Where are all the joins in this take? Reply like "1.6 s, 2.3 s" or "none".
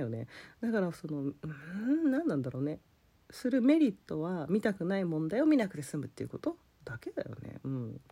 none